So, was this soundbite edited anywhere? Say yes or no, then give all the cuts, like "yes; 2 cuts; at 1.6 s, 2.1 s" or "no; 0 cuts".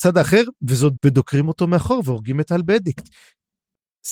yes; 1 cut; at 1.0 s